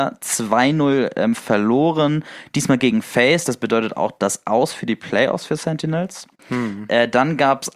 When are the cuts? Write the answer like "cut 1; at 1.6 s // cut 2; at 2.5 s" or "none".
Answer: none